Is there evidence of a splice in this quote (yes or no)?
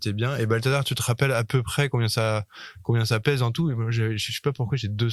no